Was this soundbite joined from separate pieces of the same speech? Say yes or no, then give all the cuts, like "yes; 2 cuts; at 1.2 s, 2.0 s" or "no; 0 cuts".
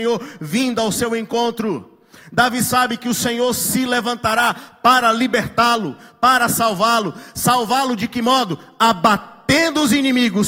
no; 0 cuts